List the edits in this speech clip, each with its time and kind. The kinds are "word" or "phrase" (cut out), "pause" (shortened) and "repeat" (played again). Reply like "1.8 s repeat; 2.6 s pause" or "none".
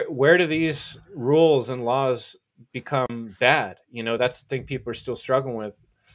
none